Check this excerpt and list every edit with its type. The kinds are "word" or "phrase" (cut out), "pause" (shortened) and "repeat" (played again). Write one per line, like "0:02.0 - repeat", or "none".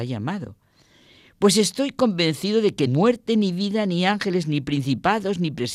0:02.9 - word